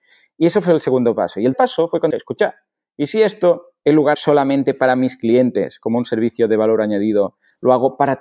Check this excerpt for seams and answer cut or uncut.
cut